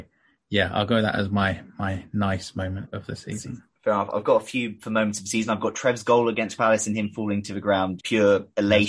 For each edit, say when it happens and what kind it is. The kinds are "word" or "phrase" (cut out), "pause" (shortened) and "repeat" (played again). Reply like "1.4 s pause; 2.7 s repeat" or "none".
2.8 s word; 6.6 s word; 8.0 s word